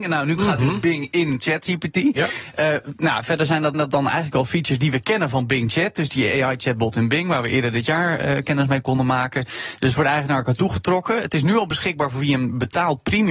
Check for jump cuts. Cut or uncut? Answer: cut